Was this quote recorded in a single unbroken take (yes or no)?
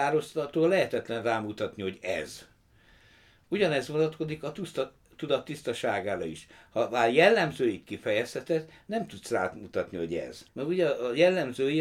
no